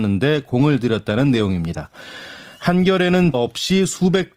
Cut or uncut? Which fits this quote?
cut